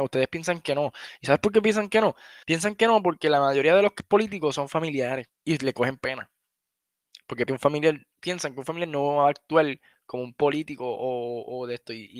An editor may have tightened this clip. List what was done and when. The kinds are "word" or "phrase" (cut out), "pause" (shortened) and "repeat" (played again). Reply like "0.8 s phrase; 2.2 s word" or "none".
2.4 s pause; 5.3 s pause; 7.5 s word; 8.1 s pause